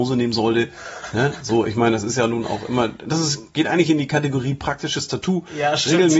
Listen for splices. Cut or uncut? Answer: uncut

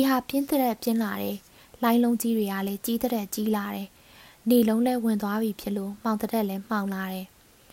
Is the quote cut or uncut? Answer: uncut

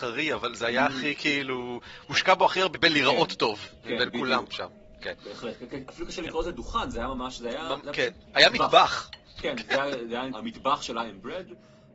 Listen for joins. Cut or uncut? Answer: cut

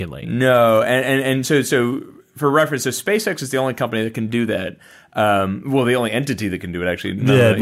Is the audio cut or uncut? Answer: uncut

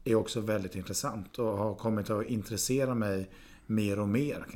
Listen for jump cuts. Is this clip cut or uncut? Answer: uncut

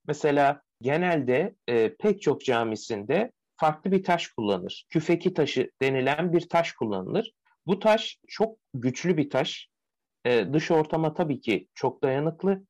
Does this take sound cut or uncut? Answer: uncut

